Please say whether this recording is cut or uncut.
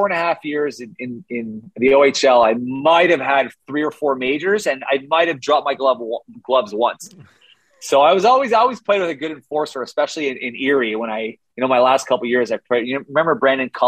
uncut